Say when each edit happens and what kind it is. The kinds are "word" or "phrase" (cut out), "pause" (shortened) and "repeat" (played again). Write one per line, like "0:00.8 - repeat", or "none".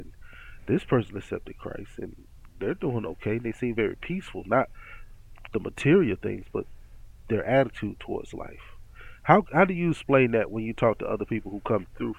none